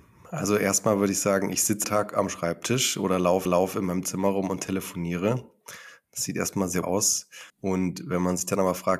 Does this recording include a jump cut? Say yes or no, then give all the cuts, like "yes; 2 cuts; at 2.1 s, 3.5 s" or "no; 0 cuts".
yes; 4 cuts; at 1.8 s, 3.5 s, 6.8 s, 7.5 s